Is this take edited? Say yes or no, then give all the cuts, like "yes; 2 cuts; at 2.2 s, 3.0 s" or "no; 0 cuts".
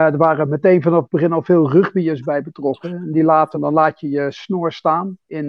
yes; 1 cut; at 3.5 s